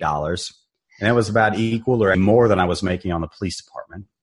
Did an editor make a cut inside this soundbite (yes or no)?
yes